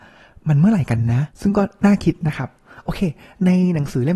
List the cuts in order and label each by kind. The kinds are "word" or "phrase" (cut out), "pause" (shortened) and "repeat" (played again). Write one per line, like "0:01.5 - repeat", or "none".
0:01.3 - pause